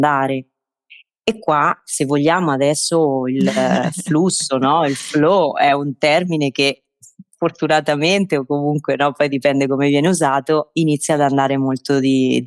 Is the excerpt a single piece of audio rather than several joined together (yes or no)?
yes